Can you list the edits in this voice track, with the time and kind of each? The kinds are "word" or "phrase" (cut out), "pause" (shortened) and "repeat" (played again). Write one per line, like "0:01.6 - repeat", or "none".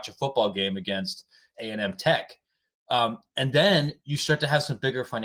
0:01.5 - phrase